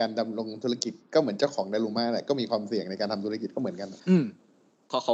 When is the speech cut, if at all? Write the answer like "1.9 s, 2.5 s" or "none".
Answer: 4.0 s